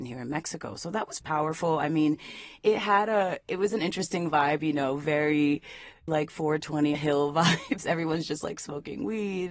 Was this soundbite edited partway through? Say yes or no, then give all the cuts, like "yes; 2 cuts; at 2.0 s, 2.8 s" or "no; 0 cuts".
yes; 3 cuts; at 1.2 s, 6.1 s, 6.9 s